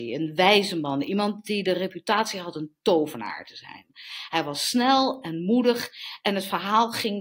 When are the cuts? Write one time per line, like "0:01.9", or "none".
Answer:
none